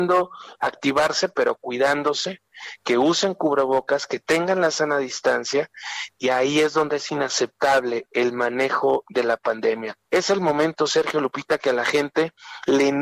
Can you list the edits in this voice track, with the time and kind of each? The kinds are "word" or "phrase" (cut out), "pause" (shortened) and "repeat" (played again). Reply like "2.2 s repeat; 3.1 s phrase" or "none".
6.1 s word